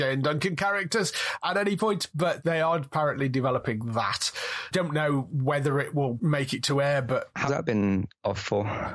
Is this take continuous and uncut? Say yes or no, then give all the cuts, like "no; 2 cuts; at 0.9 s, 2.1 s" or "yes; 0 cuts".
no; 1 cut; at 7.5 s